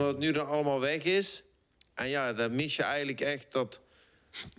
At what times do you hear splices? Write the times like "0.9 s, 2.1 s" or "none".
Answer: none